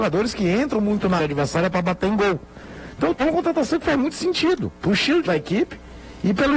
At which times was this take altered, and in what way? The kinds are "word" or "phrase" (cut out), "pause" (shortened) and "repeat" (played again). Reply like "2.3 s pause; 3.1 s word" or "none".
1.2 s word; 3.2 s word; 5.3 s word